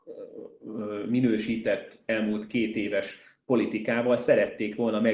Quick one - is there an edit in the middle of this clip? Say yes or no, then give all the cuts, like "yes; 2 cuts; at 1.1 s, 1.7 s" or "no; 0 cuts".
no; 0 cuts